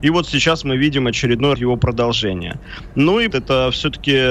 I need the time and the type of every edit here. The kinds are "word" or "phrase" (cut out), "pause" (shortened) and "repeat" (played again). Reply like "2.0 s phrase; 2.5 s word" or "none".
1.5 s word; 3.3 s phrase